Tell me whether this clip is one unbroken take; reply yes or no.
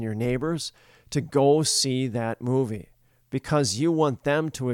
yes